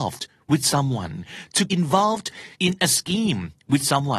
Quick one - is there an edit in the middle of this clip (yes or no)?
yes